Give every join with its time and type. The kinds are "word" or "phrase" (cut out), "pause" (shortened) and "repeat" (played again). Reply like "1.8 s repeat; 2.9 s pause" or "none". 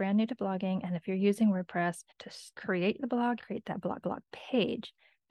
2.1 s pause; 3.4 s phrase; 4.0 s repeat